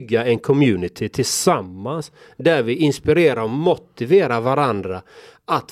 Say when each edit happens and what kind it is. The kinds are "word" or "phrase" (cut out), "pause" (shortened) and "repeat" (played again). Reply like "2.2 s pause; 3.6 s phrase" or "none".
none